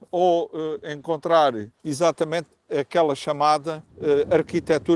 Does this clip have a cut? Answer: yes; 2 cuts; at 1.7 s, 3.9 s

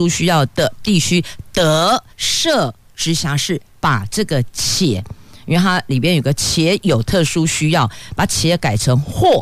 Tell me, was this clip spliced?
yes; 1 cut; at 2.1 s

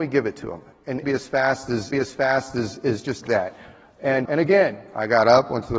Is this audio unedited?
no; 4 cuts; at 1.0 s, 1.9 s, 3.2 s, 4.3 s

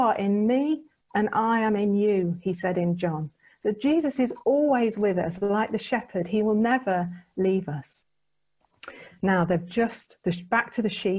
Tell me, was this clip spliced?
no; 0 cuts

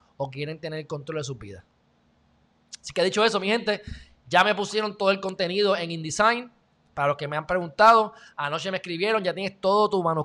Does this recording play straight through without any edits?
yes; 0 cuts

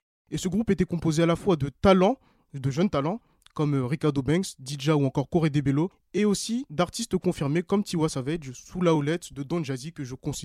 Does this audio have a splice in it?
no; 0 cuts

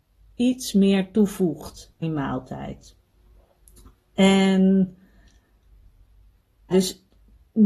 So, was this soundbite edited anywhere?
yes; 2 cuts; at 2.0 s, 6.7 s

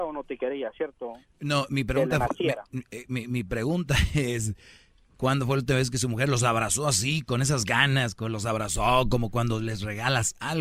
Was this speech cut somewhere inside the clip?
no; 0 cuts

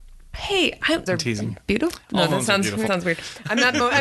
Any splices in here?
yes; 2 cuts; at 1.1 s, 2.9 s

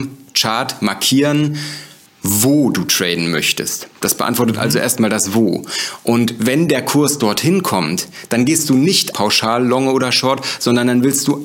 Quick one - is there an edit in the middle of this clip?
yes; 1 cut; at 9.1 s

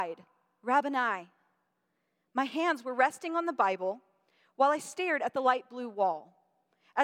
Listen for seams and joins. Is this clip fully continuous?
yes; 0 cuts

